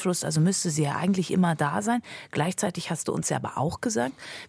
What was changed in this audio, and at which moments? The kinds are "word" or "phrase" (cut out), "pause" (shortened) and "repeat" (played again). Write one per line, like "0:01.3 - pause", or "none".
none